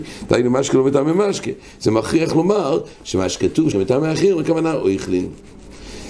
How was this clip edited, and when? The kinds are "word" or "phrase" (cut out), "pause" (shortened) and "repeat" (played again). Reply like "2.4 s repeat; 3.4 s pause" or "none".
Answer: 3.7 s word